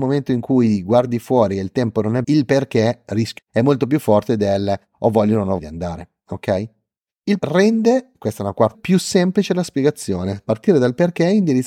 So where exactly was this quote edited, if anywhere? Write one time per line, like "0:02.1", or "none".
0:02.2
0:03.4
0:05.6
0:07.4
0:08.7